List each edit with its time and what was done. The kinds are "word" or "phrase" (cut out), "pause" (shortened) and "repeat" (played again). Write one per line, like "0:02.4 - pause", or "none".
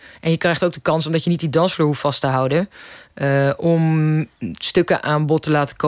none